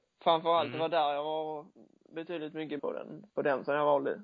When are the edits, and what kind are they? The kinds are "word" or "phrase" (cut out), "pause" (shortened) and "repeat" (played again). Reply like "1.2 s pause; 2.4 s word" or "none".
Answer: 2.8 s word; 3.3 s pause